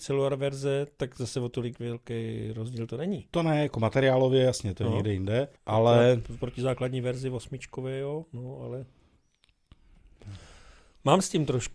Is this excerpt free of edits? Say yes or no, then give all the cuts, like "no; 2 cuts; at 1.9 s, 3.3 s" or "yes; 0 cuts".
no; 1 cut; at 5.6 s